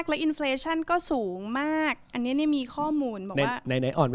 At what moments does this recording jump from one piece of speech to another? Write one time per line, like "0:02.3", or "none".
none